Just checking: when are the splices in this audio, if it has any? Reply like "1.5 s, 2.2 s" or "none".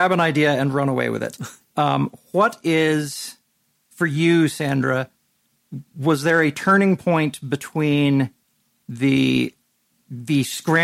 none

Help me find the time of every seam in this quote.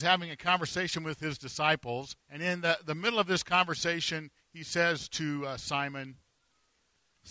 2.2 s, 4.4 s

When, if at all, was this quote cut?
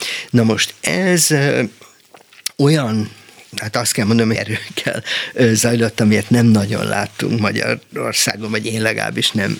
4.4 s

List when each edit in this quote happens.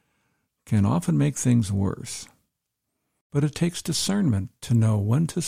none

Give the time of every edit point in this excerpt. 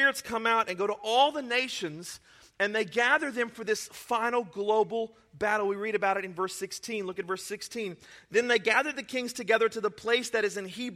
none

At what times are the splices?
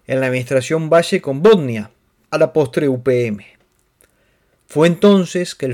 none

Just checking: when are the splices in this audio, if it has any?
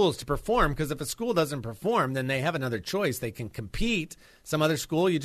none

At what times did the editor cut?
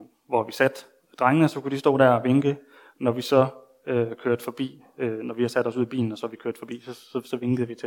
none

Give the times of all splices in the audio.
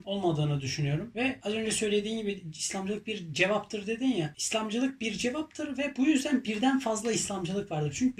none

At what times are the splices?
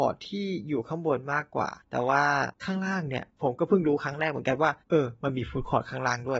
3.3 s, 4.8 s

